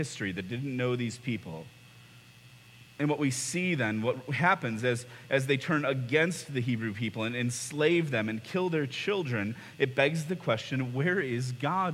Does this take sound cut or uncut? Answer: uncut